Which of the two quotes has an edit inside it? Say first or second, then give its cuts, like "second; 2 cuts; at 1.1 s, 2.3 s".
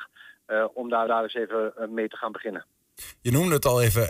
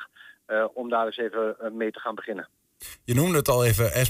first; 1 cut; at 1.1 s